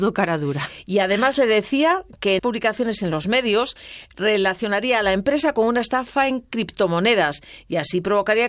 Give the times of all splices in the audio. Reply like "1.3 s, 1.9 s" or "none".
2.4 s